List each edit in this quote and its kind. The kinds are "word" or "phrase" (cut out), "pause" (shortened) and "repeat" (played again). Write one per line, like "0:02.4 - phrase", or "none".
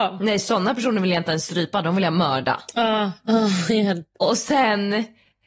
none